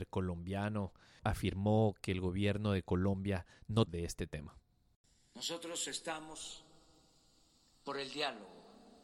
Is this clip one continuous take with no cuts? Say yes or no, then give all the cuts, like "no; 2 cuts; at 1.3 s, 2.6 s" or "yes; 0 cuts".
no; 1 cut; at 3.9 s